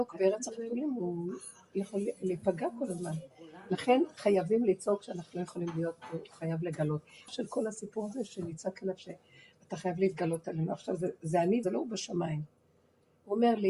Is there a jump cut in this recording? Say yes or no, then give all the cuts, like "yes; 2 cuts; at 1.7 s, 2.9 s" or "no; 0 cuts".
yes; 2 cuts; at 7.3 s, 11.6 s